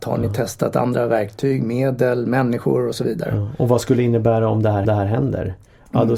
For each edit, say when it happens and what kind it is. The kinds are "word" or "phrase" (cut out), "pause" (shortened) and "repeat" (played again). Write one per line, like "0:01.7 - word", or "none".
0:04.8 - repeat